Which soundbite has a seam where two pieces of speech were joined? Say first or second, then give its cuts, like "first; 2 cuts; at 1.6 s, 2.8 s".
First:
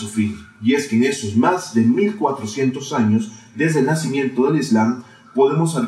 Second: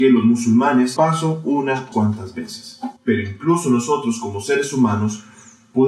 second; 3 cuts; at 1.0 s, 1.9 s, 3.0 s